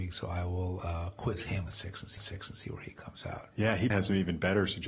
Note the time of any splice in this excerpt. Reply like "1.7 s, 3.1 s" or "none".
1.7 s, 2.2 s, 3.9 s